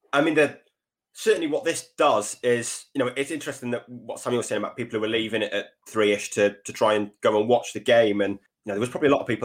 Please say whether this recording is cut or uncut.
uncut